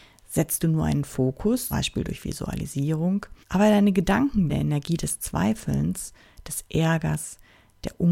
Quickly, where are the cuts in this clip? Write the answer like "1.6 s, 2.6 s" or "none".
1.7 s, 3.4 s, 4.5 s